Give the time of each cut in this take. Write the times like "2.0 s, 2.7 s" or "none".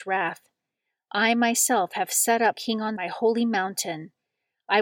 2.5 s, 3.0 s